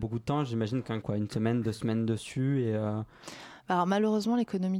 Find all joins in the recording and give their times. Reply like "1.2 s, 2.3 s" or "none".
1.0 s